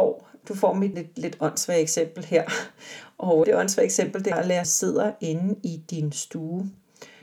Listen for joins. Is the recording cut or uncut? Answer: cut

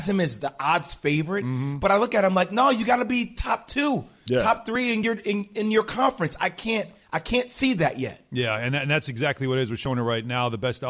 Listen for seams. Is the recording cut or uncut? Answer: uncut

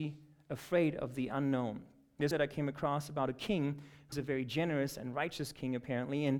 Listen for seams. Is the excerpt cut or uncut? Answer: cut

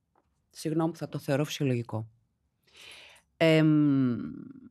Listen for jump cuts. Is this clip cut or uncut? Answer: cut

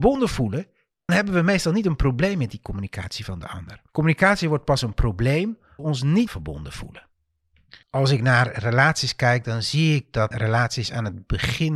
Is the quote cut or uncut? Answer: cut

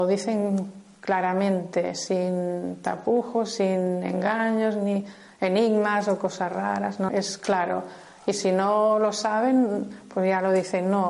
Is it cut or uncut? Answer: cut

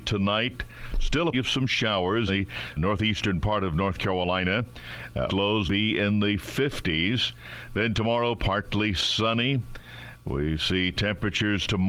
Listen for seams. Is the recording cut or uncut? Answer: cut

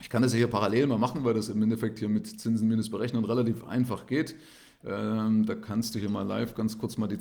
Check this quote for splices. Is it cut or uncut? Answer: uncut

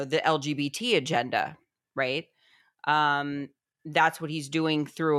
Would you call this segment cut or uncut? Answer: uncut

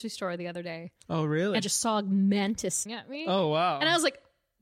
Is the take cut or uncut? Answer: cut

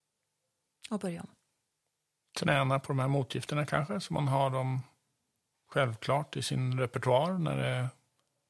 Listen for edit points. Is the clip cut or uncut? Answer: uncut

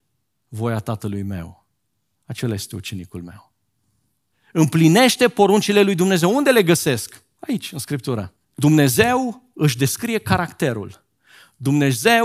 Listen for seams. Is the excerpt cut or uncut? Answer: cut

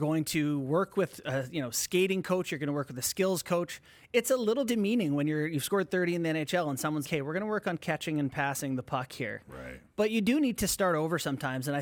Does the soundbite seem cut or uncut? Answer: cut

